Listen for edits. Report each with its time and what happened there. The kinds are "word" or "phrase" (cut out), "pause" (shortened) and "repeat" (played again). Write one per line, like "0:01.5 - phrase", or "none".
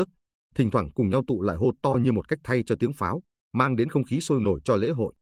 none